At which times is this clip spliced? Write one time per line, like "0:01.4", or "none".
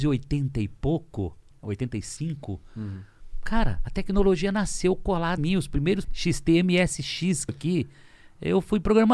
0:01.5
0:05.4
0:06.0
0:07.5